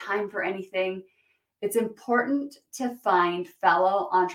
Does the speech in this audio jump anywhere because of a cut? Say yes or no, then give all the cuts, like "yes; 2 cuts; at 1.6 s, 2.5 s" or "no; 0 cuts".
no; 0 cuts